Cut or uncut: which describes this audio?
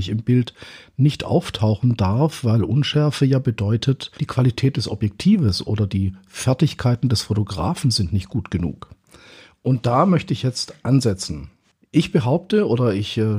cut